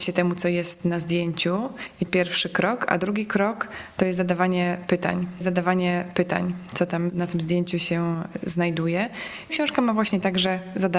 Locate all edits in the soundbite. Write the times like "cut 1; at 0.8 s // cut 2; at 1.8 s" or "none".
cut 1; at 2.1 s // cut 2; at 5.4 s // cut 3; at 9.5 s